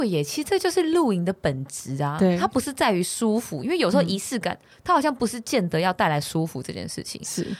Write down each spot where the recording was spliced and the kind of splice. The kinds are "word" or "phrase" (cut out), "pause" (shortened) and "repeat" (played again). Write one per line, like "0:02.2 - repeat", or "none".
none